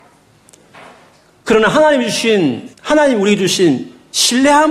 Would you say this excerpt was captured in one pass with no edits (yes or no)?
no